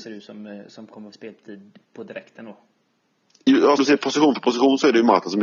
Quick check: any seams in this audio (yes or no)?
yes